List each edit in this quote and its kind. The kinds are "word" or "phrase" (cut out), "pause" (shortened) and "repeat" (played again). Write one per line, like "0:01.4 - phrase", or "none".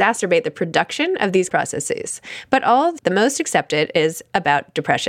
0:01.5 - phrase
0:03.0 - word